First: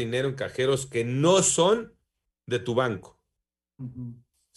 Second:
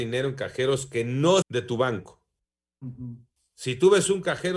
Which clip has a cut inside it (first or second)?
second